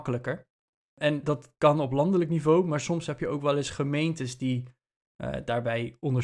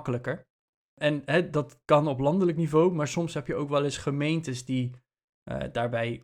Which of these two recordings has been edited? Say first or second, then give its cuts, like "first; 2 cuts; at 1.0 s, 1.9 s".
first; 1 cut; at 1.2 s